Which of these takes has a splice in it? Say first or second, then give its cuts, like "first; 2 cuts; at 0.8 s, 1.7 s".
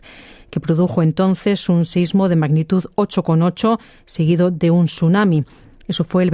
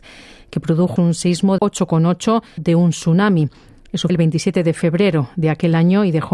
second; 4 cuts; at 1.0 s, 1.6 s, 2.6 s, 4.1 s